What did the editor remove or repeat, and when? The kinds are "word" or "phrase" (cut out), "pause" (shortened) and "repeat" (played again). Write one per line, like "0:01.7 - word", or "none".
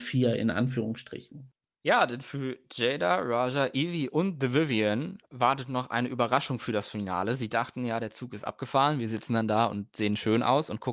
none